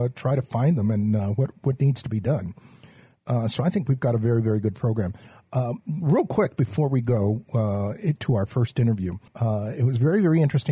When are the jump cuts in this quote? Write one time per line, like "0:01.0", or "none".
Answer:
0:09.3